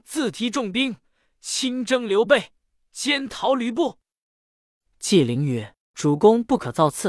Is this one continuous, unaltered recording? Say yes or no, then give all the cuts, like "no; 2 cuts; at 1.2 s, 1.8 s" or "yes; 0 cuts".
yes; 0 cuts